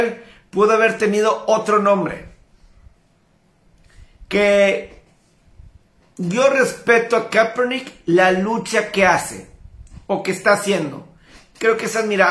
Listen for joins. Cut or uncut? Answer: uncut